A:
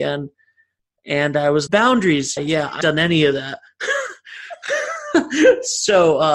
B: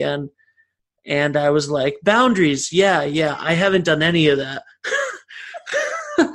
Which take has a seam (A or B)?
A